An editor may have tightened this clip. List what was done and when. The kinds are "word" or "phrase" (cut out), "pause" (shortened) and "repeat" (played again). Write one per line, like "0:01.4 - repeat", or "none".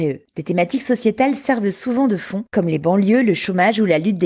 none